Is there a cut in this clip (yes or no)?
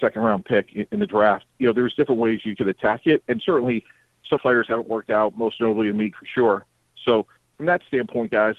yes